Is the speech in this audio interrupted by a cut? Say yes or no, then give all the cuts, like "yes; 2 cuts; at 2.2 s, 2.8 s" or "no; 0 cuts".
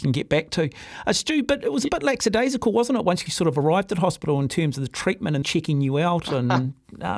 yes; 2 cuts; at 3.3 s, 5.4 s